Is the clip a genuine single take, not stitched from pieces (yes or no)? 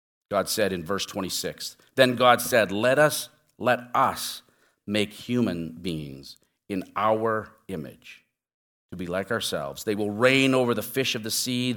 yes